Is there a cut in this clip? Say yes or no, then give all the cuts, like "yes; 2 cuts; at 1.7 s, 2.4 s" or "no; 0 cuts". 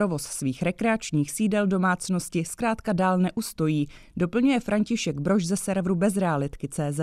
no; 0 cuts